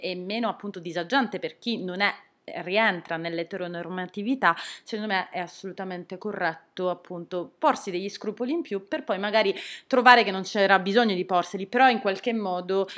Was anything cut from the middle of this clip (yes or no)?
no